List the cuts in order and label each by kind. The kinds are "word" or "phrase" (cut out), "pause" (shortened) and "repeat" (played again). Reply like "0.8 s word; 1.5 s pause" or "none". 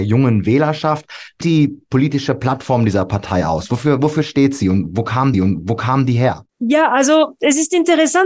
1.4 s word; 5.3 s repeat; 6.5 s pause